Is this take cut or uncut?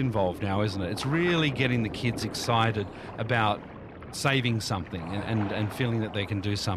uncut